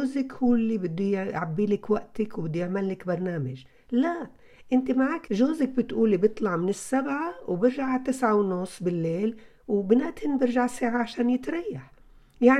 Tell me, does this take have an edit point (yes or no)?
yes